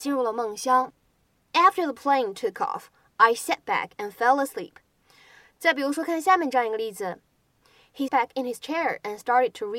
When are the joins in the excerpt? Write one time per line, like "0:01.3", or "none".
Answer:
0:08.1